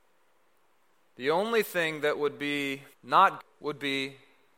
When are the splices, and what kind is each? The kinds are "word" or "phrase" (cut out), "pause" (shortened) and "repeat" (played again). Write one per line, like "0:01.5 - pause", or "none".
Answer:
0:03.4 - word